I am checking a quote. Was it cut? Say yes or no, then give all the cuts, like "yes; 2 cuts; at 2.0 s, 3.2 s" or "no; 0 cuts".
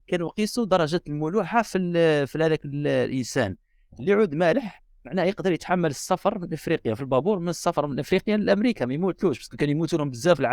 no; 0 cuts